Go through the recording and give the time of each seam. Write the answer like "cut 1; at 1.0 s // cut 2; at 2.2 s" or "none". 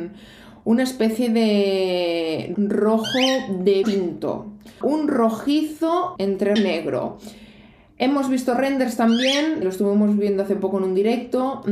cut 1; at 2.5 s // cut 2; at 3.8 s // cut 3; at 4.8 s // cut 4; at 6.2 s // cut 5; at 6.6 s // cut 6; at 9.6 s